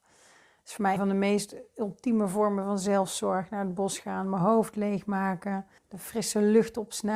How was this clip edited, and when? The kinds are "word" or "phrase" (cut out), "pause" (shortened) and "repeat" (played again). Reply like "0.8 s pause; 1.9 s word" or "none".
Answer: 1.0 s word; 5.8 s pause